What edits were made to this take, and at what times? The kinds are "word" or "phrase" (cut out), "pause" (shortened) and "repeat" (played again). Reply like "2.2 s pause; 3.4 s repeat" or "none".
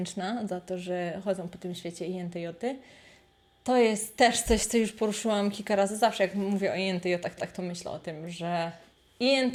7.4 s repeat